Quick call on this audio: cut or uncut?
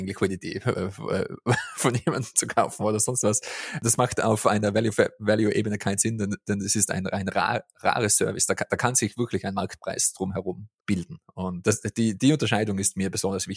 cut